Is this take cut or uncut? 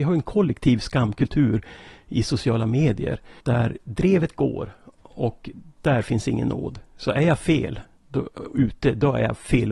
cut